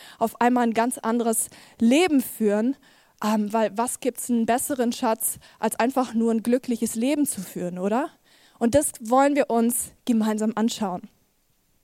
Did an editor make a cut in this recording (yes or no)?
no